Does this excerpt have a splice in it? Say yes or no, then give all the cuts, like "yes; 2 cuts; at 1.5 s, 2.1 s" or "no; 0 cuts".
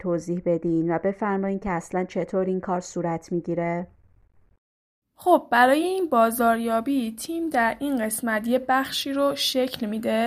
no; 0 cuts